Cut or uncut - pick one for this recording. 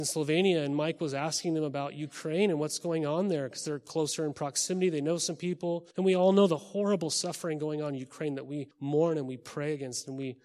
cut